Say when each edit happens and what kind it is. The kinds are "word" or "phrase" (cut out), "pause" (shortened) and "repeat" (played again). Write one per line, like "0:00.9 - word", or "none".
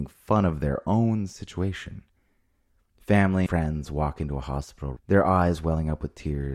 0:03.5 - word
0:05.0 - word